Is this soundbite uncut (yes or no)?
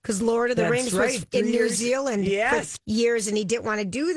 no